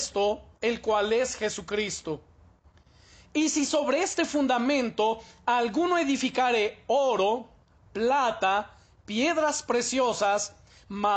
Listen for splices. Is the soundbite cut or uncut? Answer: uncut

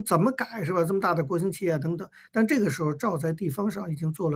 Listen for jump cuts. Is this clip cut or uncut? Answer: uncut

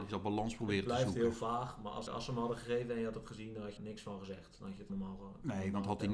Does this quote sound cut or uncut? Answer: cut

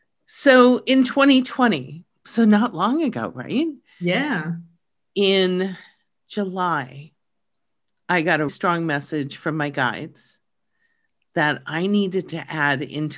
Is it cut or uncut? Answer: cut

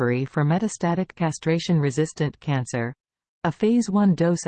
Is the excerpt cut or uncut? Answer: cut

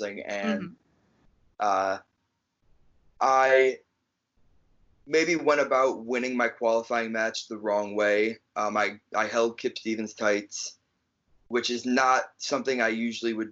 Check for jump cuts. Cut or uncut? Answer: uncut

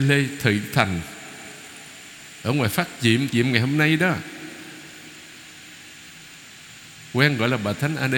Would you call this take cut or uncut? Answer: cut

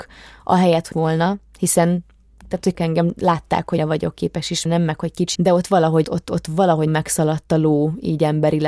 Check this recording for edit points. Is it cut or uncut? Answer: cut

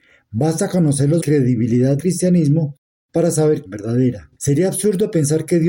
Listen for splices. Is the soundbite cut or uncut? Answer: cut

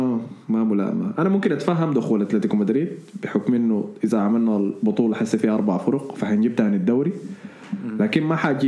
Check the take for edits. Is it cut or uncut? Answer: uncut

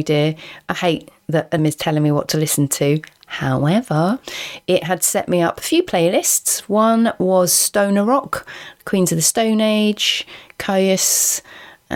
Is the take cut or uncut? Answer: cut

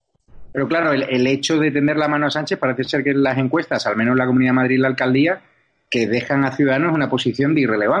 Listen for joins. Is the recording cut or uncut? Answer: uncut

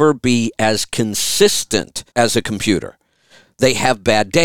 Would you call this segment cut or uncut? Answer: cut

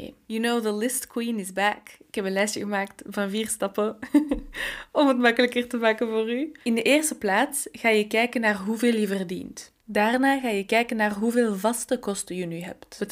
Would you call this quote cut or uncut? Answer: cut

